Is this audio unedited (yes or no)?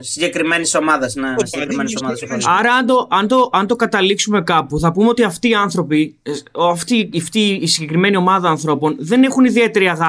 yes